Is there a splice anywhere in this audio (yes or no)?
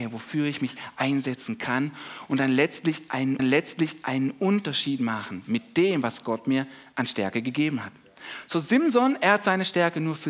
yes